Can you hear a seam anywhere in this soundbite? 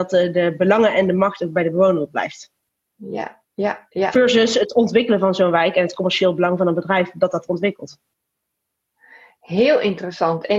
no; 0 cuts

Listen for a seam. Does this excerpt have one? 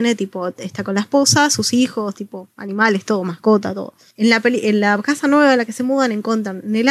no; 0 cuts

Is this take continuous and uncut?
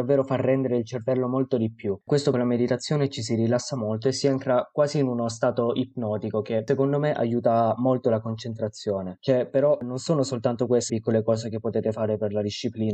no; 2 cuts; at 2.3 s, 10.9 s

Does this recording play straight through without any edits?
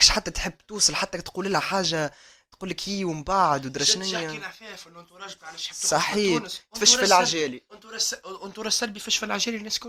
yes; 0 cuts

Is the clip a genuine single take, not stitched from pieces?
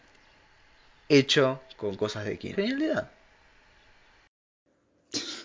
no; 1 cut; at 2.5 s

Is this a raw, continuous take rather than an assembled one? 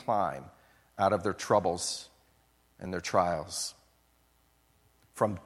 yes; 0 cuts

